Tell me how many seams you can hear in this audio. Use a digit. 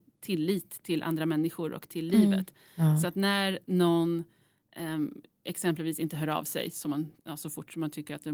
1